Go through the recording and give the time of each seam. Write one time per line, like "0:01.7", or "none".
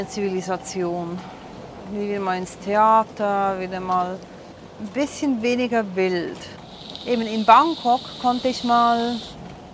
none